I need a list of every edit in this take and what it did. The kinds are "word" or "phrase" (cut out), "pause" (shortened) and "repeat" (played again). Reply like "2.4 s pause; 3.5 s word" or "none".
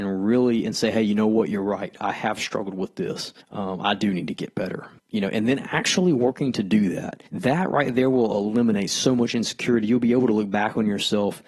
3.4 s pause; 5.0 s pause; 7.3 s pause